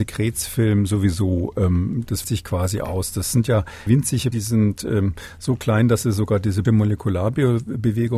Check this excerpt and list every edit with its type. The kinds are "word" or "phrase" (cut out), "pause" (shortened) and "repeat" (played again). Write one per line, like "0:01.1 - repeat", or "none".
0:02.2 - word
0:03.9 - phrase
0:04.3 - phrase
0:06.6 - word